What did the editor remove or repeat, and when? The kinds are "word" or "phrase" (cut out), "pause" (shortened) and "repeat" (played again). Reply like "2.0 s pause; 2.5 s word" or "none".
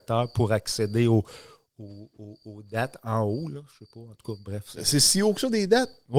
none